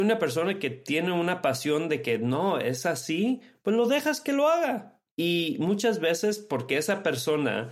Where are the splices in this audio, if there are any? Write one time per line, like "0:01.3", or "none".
0:05.1

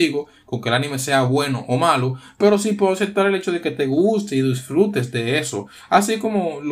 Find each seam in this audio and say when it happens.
none

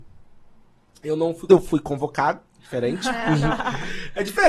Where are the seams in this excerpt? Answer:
0:01.5
0:02.5

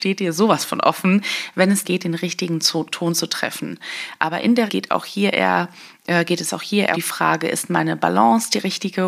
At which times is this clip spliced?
0:01.8
0:04.7
0:06.9

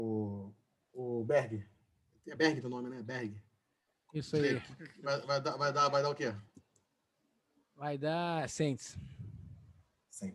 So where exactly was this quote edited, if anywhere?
none

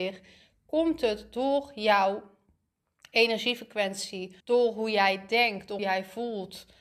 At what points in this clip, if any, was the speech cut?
0:04.4
0:05.8

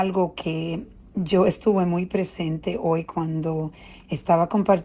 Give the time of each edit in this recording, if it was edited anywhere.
none

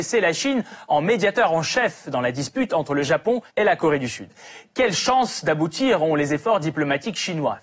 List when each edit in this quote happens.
0:03.5

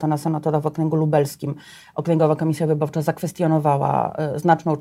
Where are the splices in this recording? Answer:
none

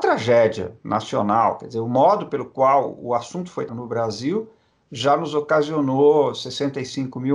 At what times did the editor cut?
0:03.7

